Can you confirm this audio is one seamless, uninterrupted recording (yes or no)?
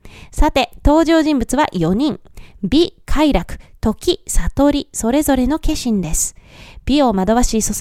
yes